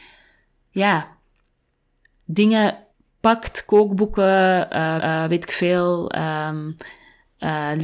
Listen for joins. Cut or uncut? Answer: cut